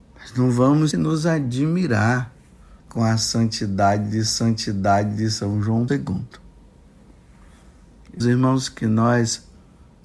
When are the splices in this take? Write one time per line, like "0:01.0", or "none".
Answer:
0:00.9
0:02.8
0:04.3
0:05.9
0:08.2